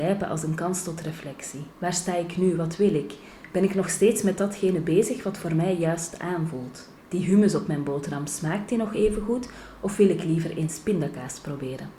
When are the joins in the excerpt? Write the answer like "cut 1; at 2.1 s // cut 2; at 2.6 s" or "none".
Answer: cut 1; at 1.7 s // cut 2; at 7.0 s